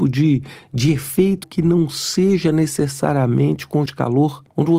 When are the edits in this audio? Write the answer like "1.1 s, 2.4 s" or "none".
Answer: 1.4 s, 3.9 s